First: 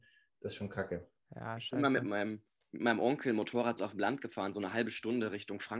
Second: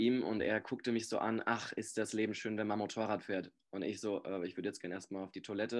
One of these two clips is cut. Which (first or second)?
first